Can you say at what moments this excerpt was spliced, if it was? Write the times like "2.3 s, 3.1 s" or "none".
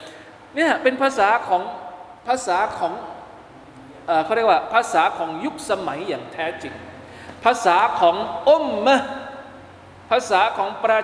2.2 s